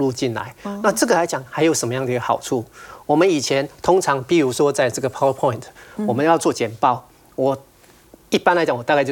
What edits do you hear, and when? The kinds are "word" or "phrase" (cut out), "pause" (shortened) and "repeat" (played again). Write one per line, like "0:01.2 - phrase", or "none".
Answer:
none